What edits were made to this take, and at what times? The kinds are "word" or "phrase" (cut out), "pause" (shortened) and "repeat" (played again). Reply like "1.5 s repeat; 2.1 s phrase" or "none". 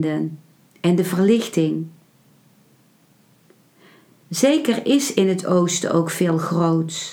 none

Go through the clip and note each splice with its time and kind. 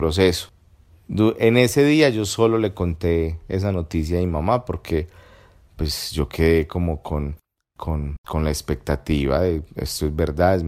none

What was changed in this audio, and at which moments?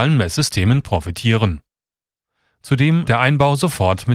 3.1 s word

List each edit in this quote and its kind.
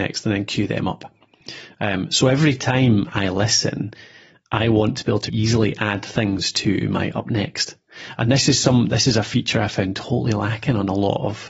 5.3 s word

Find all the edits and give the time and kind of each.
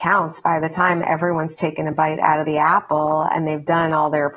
none

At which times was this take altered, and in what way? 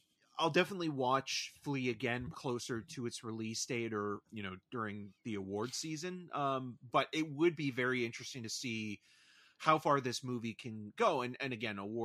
2.3 s word; 4.2 s word

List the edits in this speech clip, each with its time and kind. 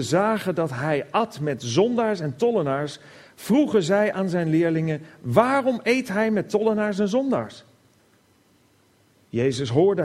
none

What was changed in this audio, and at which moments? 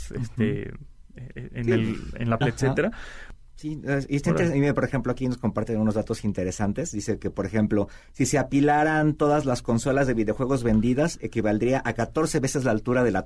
2.4 s word

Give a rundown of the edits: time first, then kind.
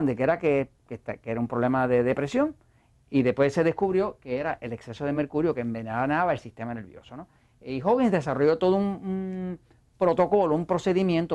none

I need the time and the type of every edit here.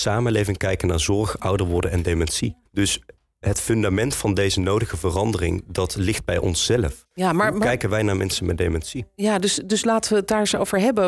2.7 s pause

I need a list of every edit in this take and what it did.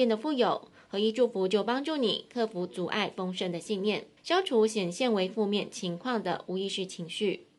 4.2 s pause

